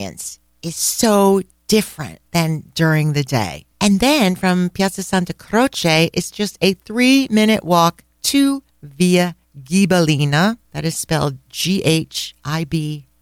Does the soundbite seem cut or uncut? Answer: cut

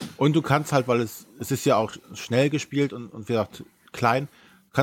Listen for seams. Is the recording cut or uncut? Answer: uncut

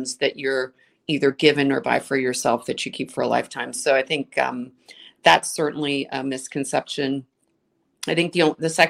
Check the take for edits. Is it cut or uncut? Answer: uncut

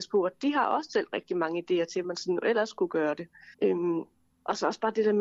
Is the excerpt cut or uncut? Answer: cut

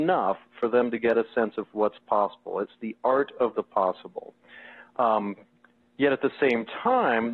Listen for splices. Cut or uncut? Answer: uncut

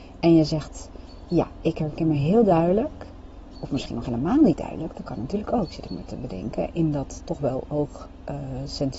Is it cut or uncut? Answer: uncut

